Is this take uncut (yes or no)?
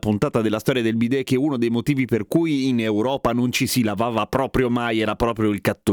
yes